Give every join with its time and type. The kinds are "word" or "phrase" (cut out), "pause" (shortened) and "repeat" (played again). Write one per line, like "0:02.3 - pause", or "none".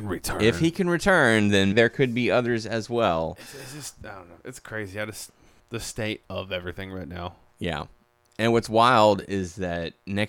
0:01.7 - word
0:04.4 - pause
0:05.6 - pause